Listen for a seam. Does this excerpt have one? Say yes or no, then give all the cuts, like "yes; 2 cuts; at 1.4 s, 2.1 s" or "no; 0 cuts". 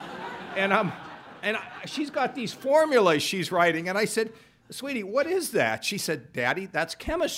no; 0 cuts